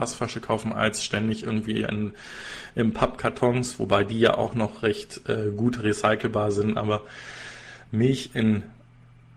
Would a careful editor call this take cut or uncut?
uncut